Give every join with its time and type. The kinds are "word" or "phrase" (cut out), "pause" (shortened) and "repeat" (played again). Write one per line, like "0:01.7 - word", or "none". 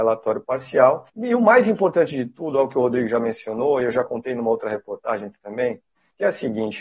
0:01.1 - pause